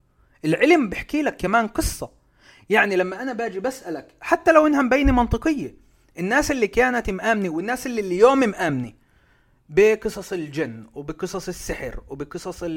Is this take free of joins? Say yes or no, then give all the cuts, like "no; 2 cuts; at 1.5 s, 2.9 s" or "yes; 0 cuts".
yes; 0 cuts